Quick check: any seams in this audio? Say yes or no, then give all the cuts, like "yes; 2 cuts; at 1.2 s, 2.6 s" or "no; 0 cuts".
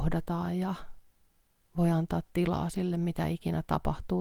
no; 0 cuts